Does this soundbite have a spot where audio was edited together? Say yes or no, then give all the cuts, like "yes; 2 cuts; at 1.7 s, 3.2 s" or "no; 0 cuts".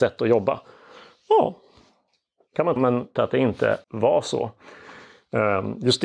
yes; 3 cuts; at 2.8 s, 3.2 s, 3.8 s